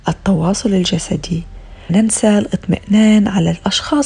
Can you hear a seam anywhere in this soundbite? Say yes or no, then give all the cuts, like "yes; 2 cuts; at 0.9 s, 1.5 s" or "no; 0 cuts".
yes; 1 cut; at 1.9 s